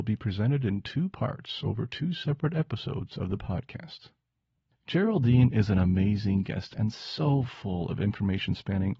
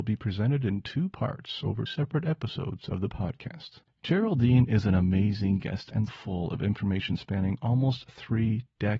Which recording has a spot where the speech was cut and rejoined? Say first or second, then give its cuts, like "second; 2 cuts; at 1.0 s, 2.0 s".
second; 3 cuts; at 1.9 s, 3.8 s, 6.1 s